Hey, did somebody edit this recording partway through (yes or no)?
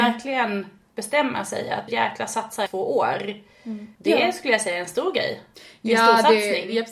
yes